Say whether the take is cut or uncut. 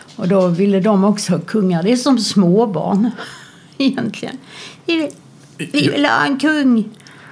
uncut